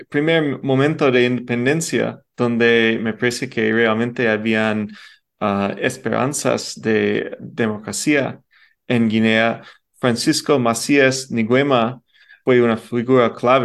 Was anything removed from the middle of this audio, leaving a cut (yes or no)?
no